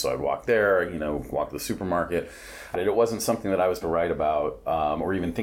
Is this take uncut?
no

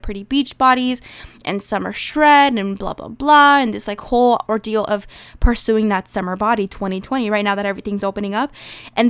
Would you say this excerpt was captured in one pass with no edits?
yes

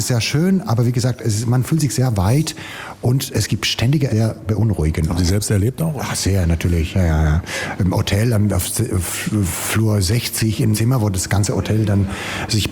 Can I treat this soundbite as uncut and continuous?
no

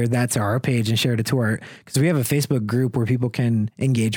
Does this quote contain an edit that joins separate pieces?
no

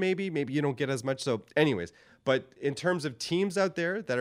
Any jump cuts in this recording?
no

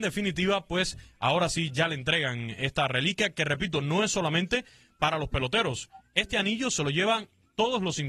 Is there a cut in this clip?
yes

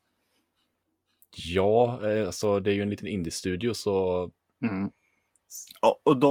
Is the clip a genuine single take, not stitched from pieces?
no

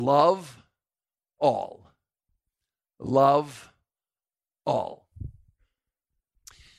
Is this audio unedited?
yes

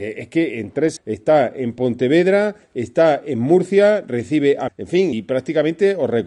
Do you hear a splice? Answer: yes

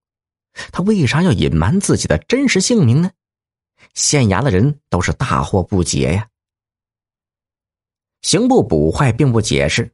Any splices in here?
no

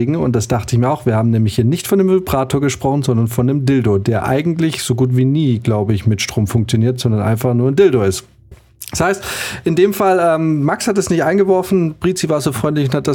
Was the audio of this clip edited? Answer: no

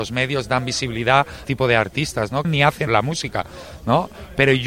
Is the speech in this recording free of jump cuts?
no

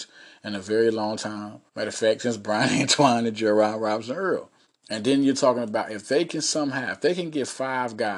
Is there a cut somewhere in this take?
yes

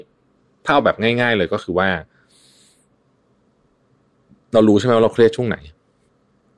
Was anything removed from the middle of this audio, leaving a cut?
no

